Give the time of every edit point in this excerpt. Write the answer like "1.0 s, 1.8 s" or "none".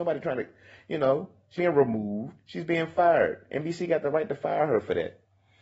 1.6 s